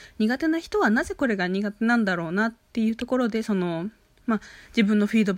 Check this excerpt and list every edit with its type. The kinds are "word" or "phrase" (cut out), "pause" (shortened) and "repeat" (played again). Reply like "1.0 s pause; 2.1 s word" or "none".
none